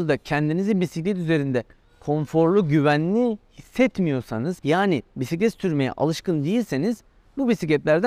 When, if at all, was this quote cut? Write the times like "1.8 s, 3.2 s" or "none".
none